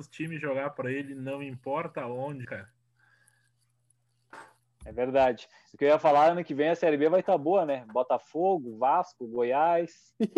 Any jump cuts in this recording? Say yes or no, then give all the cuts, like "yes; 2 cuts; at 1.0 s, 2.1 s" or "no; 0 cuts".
yes; 1 cut; at 2.4 s